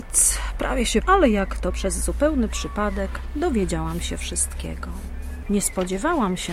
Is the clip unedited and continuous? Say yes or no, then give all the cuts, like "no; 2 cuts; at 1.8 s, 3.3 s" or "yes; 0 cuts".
no; 2 cuts; at 1.0 s, 1.7 s